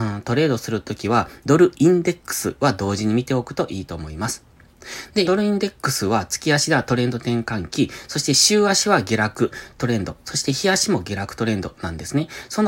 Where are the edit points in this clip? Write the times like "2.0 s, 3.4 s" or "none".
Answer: 5.2 s